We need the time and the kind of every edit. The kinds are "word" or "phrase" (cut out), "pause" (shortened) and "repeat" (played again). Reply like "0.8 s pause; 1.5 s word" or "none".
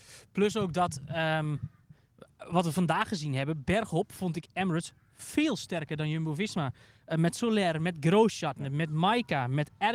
none